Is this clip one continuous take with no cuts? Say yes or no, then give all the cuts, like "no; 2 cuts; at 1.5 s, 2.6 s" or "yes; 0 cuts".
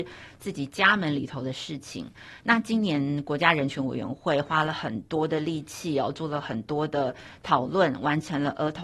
yes; 0 cuts